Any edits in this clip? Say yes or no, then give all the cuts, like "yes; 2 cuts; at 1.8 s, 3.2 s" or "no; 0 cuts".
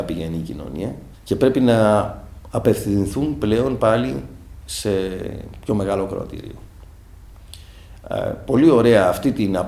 yes; 1 cut; at 1.1 s